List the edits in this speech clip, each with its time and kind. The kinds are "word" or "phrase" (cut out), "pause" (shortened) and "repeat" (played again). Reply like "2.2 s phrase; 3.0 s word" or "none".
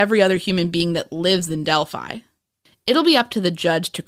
none